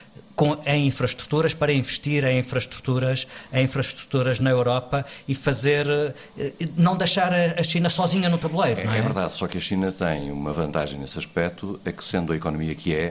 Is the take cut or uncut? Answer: uncut